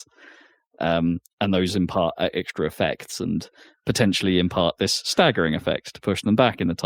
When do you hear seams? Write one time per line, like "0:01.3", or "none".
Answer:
none